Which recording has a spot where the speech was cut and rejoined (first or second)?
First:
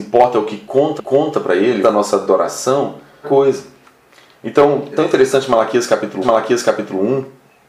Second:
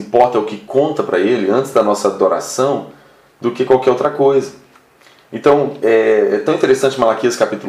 first